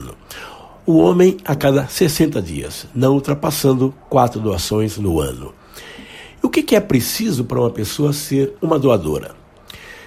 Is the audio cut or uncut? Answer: cut